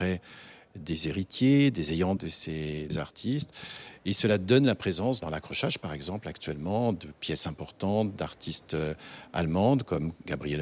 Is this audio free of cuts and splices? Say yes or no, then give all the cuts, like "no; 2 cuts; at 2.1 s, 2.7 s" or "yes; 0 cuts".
no; 3 cuts; at 2.2 s, 2.9 s, 5.2 s